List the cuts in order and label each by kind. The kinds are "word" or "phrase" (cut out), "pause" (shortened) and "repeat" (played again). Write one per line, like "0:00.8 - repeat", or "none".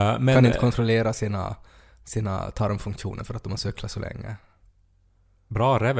none